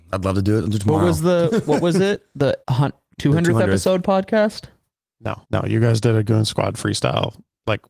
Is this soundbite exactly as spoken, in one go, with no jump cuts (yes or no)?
no